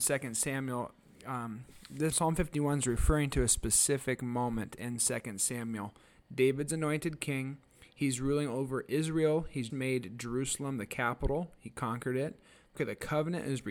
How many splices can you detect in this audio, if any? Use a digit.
3